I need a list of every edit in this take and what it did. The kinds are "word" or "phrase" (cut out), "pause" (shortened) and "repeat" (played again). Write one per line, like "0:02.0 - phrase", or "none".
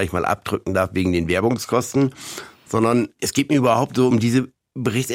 none